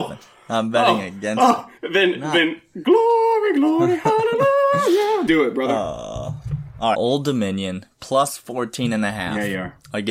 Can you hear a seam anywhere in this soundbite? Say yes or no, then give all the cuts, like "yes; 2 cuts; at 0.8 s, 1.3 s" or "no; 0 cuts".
yes; 3 cuts; at 1.8 s, 5.3 s, 6.9 s